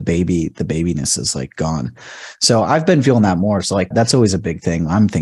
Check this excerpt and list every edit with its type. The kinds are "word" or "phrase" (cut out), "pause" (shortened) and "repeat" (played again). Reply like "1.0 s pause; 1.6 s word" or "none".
3.9 s word